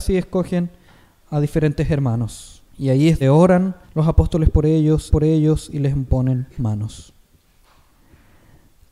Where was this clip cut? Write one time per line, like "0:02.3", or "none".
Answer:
0:02.7
0:03.2
0:03.8
0:05.1
0:06.6